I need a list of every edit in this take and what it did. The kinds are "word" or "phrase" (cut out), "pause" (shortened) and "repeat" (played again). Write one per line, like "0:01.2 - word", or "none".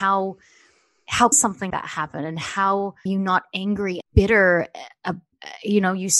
0:01.3 - word
0:01.7 - word
0:03.1 - word
0:04.0 - word